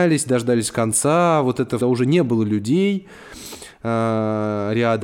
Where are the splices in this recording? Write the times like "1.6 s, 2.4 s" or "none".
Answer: 1.8 s